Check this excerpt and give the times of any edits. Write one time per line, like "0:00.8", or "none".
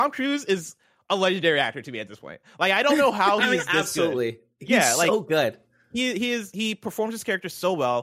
none